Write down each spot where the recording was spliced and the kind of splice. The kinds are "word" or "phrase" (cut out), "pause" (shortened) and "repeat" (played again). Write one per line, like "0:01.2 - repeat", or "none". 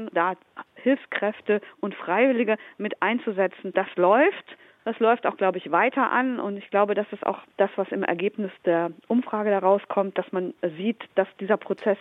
none